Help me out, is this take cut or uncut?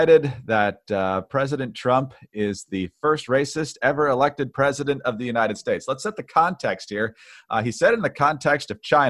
uncut